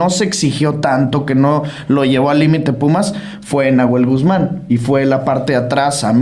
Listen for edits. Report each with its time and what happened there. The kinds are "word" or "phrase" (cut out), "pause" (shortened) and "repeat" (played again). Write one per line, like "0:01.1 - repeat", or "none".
none